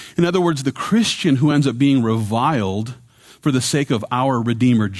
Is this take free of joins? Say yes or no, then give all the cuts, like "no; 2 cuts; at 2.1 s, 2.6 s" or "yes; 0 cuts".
yes; 0 cuts